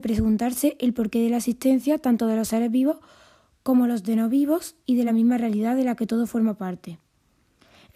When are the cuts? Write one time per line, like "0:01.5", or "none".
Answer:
none